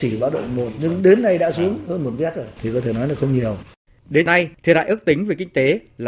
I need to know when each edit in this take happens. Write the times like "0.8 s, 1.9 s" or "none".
none